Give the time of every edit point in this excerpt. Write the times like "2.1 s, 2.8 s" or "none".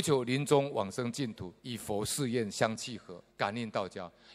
1.6 s, 3.3 s